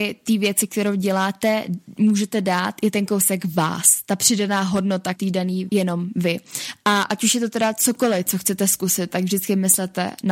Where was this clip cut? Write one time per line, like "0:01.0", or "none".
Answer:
0:05.1
0:05.7